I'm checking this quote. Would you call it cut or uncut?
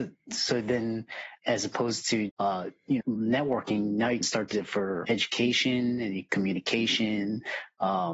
cut